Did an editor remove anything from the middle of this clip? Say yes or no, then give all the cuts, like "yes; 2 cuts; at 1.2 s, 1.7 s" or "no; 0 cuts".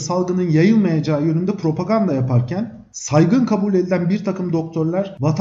no; 0 cuts